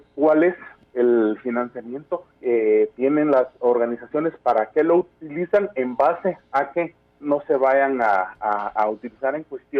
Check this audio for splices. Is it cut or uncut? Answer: cut